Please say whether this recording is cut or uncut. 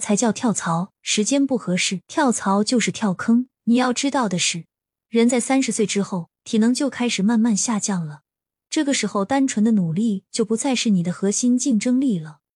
cut